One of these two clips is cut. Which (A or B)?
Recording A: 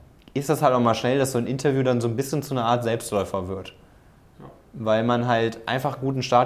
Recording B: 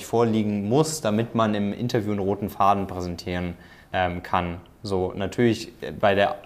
B